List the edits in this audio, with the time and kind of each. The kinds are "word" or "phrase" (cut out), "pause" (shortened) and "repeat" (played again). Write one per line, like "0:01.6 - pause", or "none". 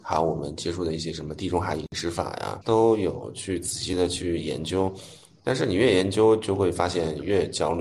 0:02.6 - word